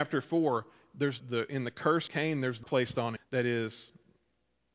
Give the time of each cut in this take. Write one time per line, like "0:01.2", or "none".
0:01.2
0:02.1
0:02.6
0:03.2